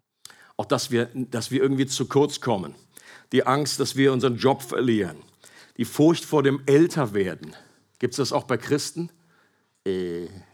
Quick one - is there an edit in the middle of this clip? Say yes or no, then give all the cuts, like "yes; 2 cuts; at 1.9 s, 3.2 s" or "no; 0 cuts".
no; 0 cuts